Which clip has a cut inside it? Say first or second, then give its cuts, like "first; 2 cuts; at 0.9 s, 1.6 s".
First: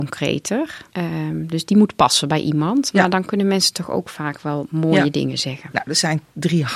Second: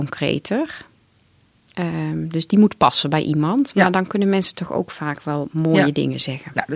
first; 1 cut; at 0.9 s